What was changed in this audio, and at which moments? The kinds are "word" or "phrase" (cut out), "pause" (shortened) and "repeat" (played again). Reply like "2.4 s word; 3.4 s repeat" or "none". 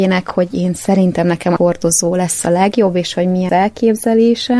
1.6 s phrase; 3.5 s word